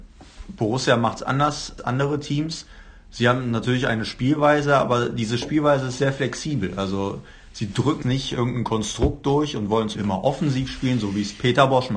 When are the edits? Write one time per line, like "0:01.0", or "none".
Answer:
0:01.8
0:08.0
0:09.9